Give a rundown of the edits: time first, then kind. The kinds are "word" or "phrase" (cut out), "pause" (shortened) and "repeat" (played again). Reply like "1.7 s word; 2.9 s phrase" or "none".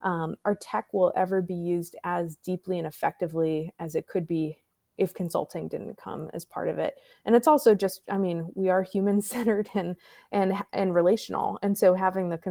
none